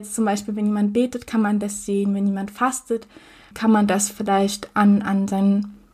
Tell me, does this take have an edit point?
no; 0 cuts

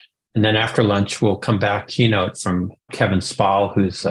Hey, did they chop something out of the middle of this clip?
yes; 2 cuts; at 1.9 s, 2.9 s

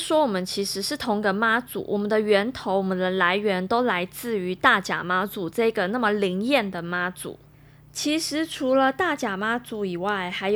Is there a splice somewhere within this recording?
no; 0 cuts

